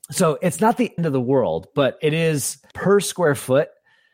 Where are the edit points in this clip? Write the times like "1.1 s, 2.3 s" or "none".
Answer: 1.0 s, 2.7 s